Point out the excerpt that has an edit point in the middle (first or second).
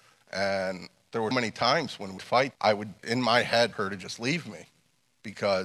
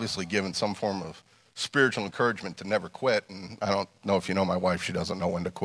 first